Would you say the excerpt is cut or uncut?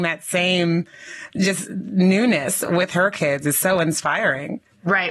uncut